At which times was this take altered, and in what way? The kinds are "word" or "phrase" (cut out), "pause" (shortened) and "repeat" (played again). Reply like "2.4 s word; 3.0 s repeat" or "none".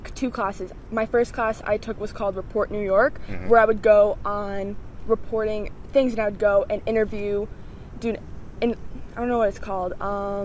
none